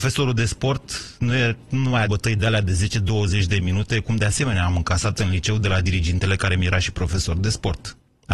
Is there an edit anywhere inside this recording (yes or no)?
yes